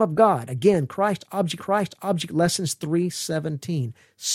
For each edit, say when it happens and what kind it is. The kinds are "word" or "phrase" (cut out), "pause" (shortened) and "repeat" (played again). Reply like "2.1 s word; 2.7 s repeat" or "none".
1.6 s repeat